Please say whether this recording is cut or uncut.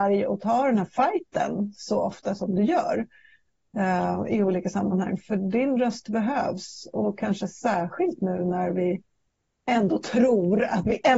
uncut